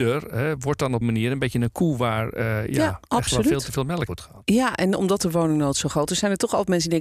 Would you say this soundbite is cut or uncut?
cut